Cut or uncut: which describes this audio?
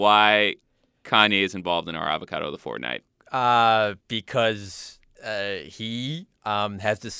cut